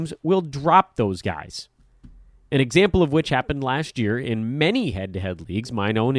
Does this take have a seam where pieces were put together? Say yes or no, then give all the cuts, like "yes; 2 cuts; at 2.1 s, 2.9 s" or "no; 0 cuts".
no; 0 cuts